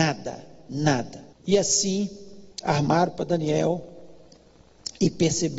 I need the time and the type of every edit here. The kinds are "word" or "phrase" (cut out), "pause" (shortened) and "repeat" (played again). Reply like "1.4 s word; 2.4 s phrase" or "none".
1.3 s pause; 2.5 s pause

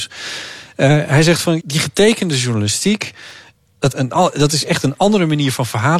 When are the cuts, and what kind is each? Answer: 1.6 s word; 3.9 s word

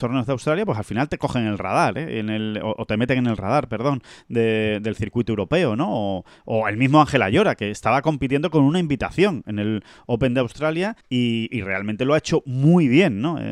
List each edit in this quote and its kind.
11.0 s pause

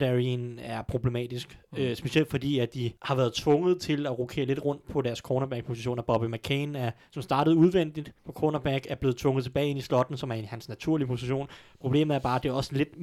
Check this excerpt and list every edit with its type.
3.0 s pause; 8.2 s pause

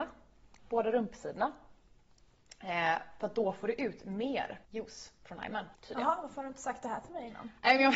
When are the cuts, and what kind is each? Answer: 4.6 s pause; 5.7 s pause

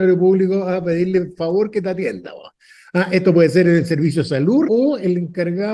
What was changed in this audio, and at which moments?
4.6 s word

